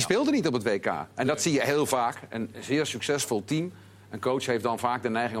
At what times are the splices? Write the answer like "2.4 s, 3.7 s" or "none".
none